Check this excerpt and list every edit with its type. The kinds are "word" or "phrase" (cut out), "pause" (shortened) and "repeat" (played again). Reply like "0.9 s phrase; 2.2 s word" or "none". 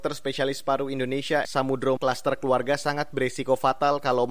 1.4 s word; 2.0 s word

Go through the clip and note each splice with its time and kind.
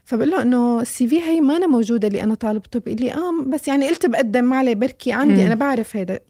none

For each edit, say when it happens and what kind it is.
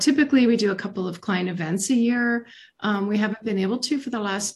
none

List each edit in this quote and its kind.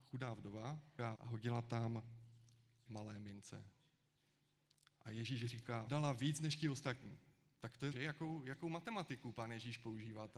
1.1 s word; 2.9 s word; 5.9 s word; 7.9 s word

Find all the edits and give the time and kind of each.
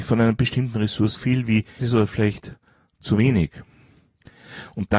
1.1 s word; 1.8 s word

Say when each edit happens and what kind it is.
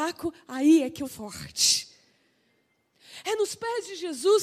1.0 s word

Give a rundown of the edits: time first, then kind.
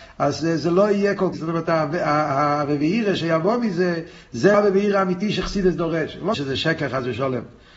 1.3 s phrase; 4.5 s word; 6.3 s word

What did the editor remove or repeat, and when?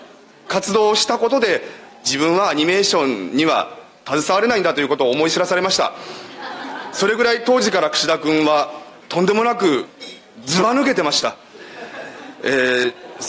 none

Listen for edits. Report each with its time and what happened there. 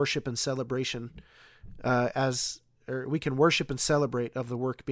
none

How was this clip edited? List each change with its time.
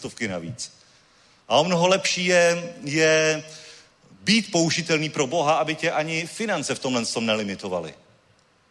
none

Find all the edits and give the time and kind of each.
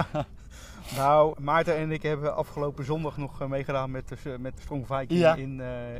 1.3 s word; 4.6 s word

